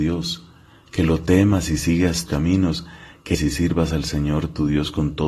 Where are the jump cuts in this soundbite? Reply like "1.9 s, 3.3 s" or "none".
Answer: 2.3 s, 3.3 s